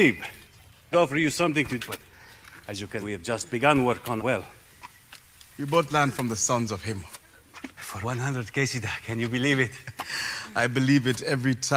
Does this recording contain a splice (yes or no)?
yes